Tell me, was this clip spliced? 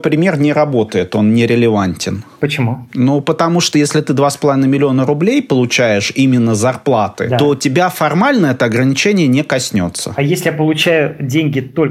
no; 0 cuts

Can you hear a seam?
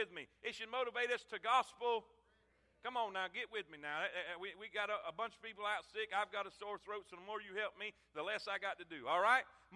no; 0 cuts

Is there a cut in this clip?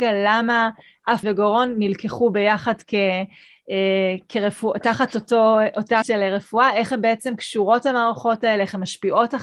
yes; 2 cuts; at 1.2 s, 6.0 s

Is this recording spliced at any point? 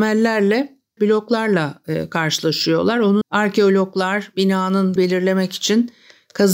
yes; 3 cuts; at 1.0 s, 3.2 s, 5.0 s

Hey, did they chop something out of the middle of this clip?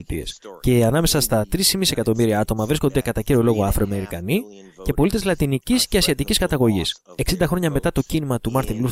no; 0 cuts

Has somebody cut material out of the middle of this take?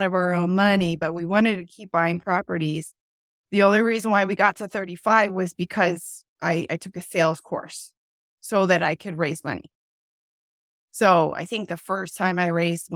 no; 0 cuts

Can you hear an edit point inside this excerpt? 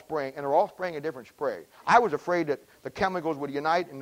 no; 0 cuts

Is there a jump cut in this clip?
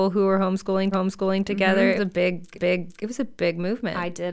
yes; 3 cuts; at 0.9 s, 2.0 s, 2.5 s

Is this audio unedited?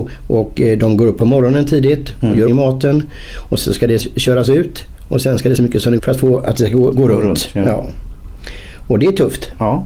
no; 6 cuts; at 2.5 s, 3.6 s, 4.0 s, 5.6 s, 6.0 s, 6.9 s

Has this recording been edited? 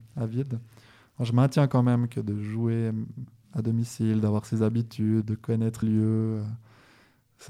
yes; 2 cuts; at 5.2 s, 5.8 s

